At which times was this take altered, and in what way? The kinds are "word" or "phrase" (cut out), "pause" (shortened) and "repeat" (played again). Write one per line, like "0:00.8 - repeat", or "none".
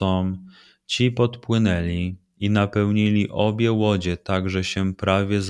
none